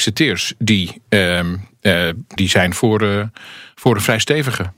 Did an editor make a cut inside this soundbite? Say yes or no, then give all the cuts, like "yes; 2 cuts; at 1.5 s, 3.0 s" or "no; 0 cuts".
yes; 2 cuts; at 2.4 s, 2.7 s